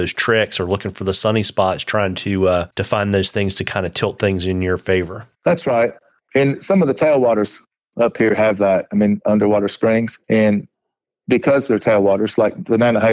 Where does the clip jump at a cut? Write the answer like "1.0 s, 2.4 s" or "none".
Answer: 2.7 s, 5.3 s, 10.2 s